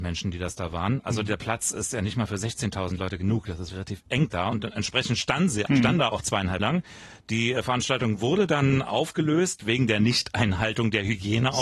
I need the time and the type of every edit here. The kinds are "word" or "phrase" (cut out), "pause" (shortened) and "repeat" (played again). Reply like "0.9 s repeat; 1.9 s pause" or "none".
3.7 s word; 5.7 s word; 6.6 s word